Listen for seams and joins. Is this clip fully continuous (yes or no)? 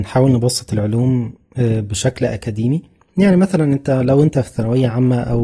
yes